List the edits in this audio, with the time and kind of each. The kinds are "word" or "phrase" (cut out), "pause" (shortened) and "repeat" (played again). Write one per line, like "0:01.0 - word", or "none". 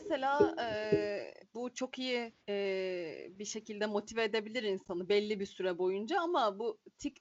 0:01.4 - pause
0:02.4 - pause